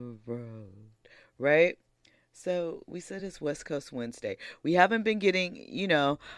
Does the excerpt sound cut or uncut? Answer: uncut